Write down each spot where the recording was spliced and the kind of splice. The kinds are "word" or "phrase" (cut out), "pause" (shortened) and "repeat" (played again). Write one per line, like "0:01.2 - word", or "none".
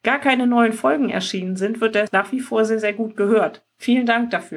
0:02.1 - word